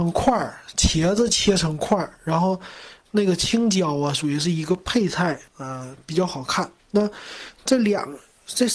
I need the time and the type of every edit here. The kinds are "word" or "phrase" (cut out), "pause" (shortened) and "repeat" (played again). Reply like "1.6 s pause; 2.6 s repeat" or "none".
5.5 s pause; 6.8 s pause